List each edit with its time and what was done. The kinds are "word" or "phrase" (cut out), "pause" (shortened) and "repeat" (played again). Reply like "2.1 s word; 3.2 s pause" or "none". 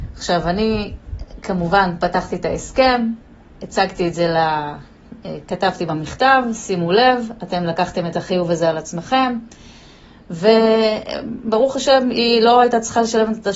none